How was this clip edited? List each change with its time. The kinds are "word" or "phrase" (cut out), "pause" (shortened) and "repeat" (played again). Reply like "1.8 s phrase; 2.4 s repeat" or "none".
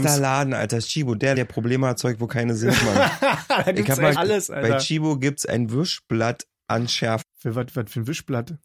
1.3 s word; 4.1 s word; 7.2 s word